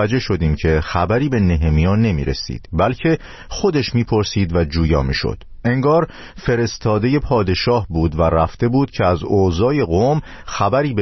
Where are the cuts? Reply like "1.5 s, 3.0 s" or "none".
none